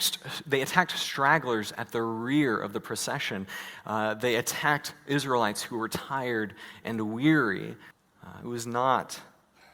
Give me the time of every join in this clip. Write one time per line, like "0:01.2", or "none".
0:07.9